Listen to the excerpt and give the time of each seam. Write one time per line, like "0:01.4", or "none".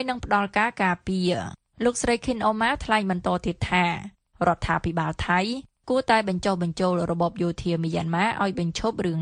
none